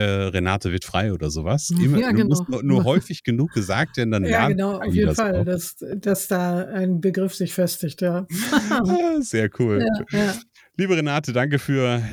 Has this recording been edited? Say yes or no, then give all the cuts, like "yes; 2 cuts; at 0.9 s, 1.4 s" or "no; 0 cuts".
no; 0 cuts